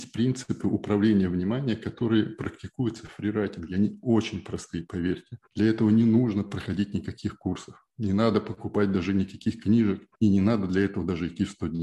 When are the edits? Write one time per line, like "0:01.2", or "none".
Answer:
0:05.5
0:10.1